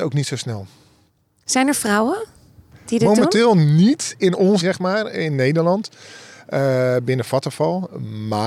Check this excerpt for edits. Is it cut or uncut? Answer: cut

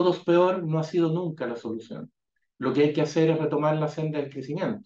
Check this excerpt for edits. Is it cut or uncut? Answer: uncut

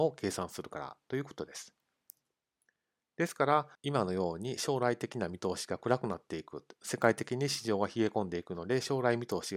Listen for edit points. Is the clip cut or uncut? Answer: uncut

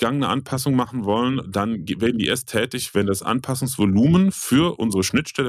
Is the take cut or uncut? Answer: uncut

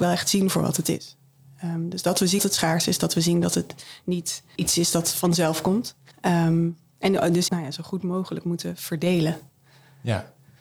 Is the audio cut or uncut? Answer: cut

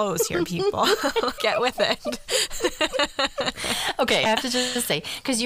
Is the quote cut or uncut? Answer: cut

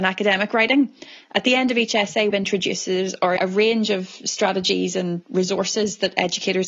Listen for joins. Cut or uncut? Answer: cut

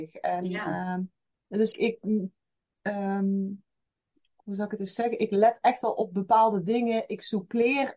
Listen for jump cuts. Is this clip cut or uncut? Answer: cut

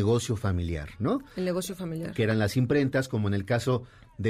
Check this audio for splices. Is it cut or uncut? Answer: uncut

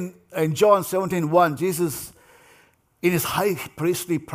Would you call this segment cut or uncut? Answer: uncut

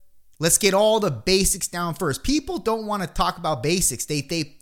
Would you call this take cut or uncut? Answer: uncut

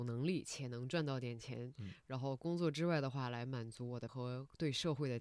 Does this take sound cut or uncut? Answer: cut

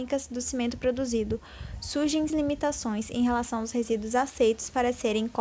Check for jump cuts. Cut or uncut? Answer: cut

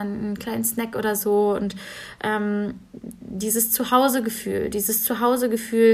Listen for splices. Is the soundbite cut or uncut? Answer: uncut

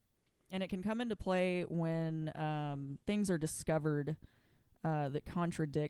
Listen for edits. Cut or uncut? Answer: cut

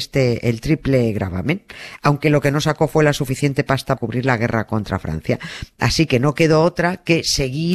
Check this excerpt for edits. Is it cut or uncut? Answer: cut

